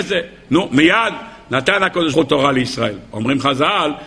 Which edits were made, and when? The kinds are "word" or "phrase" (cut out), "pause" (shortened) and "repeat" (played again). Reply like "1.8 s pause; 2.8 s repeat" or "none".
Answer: 2.1 s word